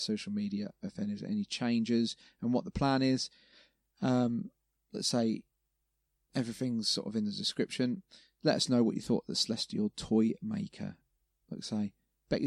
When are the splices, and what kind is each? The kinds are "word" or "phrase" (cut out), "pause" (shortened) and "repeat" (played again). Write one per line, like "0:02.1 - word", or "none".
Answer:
none